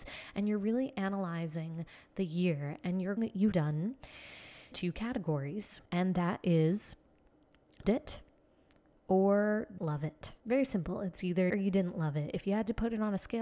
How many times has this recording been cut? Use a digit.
8